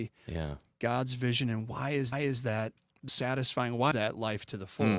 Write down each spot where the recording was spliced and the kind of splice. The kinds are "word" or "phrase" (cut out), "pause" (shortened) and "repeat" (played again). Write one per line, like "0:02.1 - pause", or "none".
0:02.1 - repeat
0:03.1 - word
0:03.9 - word